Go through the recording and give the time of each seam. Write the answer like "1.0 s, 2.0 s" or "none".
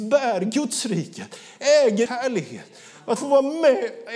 2.1 s, 3.2 s